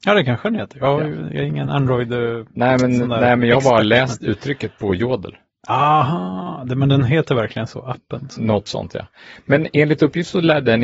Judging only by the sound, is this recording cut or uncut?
uncut